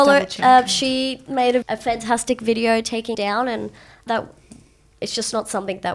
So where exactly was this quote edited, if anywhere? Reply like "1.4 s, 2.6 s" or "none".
1.6 s, 3.1 s, 4.1 s